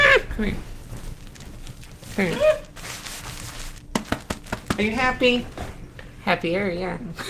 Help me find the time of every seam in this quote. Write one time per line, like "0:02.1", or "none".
none